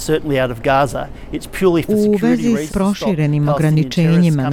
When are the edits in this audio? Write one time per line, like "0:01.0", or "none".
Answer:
0:02.7